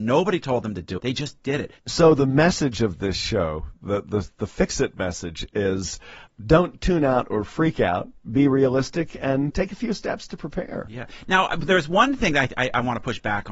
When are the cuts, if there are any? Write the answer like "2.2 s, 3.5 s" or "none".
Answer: 1.0 s, 1.8 s, 6.3 s, 9.5 s